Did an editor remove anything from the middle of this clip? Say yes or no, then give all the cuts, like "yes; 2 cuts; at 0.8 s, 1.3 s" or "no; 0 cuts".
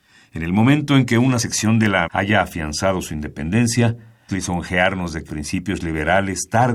yes; 4 cuts; at 1.4 s, 2.0 s, 4.3 s, 5.3 s